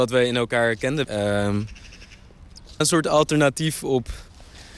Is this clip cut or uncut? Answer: cut